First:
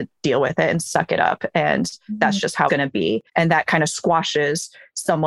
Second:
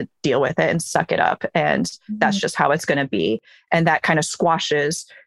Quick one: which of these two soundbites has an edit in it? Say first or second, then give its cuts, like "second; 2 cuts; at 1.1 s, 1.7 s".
first; 2 cuts; at 2.7 s, 3.3 s